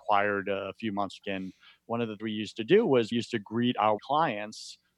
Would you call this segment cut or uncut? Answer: cut